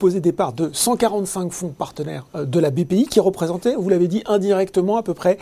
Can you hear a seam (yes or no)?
no